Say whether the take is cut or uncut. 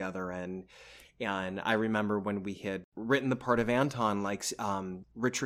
uncut